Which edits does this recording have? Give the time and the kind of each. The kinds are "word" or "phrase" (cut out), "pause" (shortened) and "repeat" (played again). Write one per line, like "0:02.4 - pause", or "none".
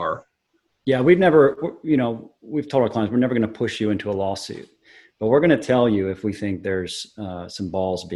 none